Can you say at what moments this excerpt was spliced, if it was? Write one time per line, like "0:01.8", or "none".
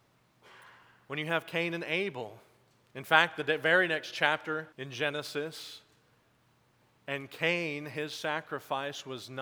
0:04.7